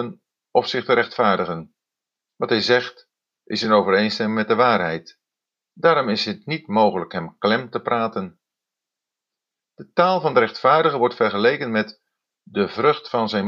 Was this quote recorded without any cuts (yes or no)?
yes